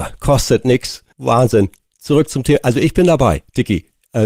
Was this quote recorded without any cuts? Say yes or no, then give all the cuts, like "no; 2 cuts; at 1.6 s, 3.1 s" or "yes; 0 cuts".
no; 1 cut; at 1.1 s